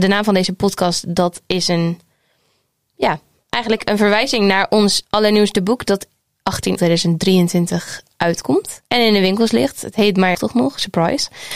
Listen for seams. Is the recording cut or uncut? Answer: cut